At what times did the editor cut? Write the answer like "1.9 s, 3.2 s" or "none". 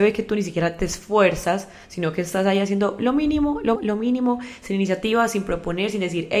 3.8 s